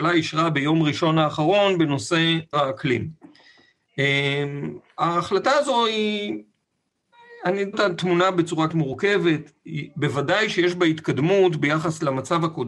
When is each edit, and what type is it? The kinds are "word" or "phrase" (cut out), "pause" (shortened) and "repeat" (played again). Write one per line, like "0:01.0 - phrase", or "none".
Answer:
0:02.5 - word
0:07.7 - word
0:08.7 - word

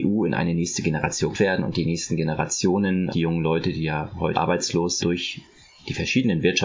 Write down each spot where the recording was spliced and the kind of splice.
0:01.3 - word
0:03.1 - phrase
0:04.3 - phrase
0:05.0 - word

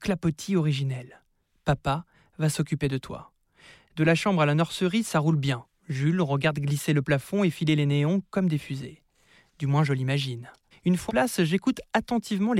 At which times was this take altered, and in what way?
0:10.7 - pause
0:11.1 - word

